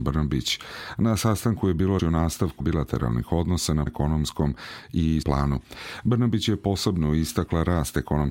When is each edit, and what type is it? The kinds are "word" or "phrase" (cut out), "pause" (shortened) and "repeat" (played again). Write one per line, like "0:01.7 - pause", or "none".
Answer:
0:02.0 - word
0:02.6 - word
0:03.9 - word
0:05.2 - word